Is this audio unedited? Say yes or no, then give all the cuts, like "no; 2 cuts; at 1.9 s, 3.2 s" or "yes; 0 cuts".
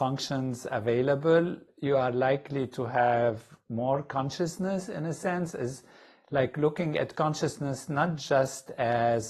yes; 0 cuts